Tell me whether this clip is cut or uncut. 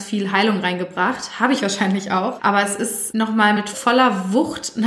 uncut